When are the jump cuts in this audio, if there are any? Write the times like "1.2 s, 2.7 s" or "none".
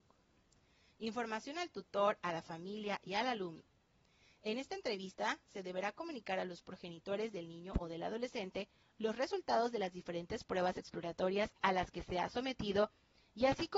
none